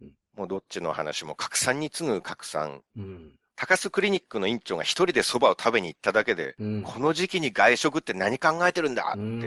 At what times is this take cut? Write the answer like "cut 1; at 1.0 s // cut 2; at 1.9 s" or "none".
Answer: none